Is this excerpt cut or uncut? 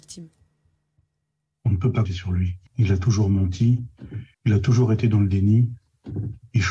cut